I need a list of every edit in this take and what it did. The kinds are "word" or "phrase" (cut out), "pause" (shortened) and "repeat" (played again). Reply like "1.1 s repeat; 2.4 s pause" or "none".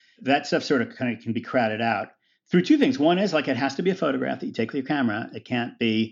none